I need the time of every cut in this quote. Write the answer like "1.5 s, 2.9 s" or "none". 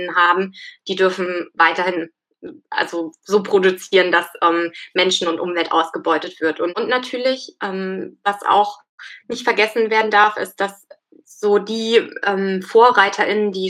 none